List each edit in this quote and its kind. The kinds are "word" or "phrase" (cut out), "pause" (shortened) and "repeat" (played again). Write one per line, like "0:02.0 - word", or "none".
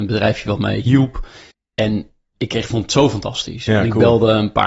0:01.5 - pause